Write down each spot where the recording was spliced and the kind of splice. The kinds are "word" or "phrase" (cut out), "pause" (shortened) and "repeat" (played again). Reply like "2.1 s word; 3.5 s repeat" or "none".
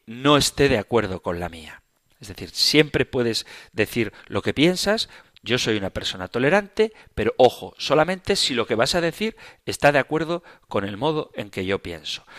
none